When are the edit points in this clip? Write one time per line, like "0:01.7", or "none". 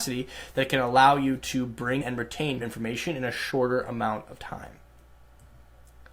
0:02.0
0:02.6